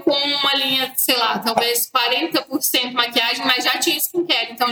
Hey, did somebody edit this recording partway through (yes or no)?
no